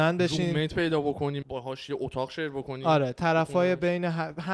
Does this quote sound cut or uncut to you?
cut